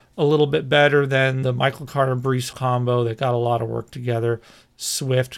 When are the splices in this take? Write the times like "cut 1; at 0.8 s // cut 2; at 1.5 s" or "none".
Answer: cut 1; at 1.4 s // cut 2; at 2.5 s